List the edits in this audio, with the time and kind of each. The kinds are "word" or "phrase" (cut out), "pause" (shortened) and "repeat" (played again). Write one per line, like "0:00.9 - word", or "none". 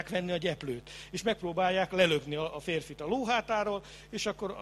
none